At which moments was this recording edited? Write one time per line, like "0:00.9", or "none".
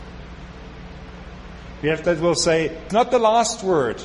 0:02.0
0:02.9

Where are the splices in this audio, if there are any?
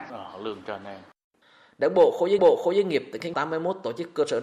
0:02.4
0:03.3

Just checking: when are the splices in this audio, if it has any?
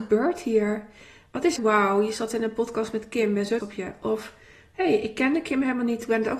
0:01.6
0:03.6

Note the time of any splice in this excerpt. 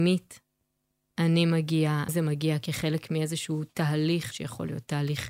0:02.1
0:04.3

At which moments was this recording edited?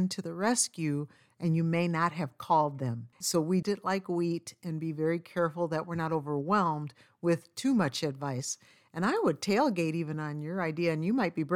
0:03.6

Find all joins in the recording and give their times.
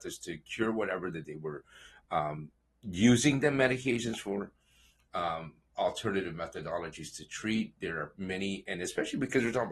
none

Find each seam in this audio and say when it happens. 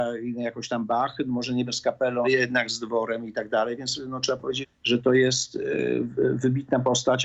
0:01.7
0:02.2
0:04.6

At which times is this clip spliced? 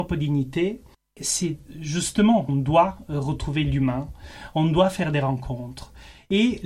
0:00.9
0:02.5

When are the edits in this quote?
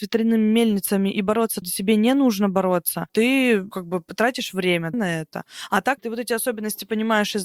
0:01.6
0:03.7
0:04.9
0:06.0

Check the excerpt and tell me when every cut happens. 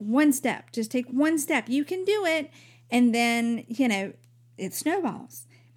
none

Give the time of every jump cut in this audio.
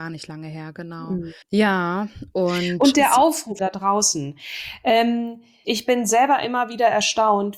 0:01.4
0:03.6
0:05.6

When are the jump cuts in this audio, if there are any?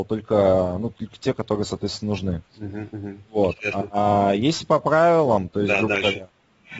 0:00.9
0:02.5

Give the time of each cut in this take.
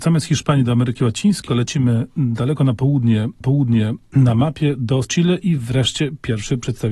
0:01.5
0:03.4
0:05.0

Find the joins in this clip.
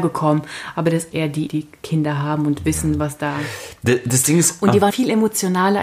0:01.1
0:01.5
0:04.9

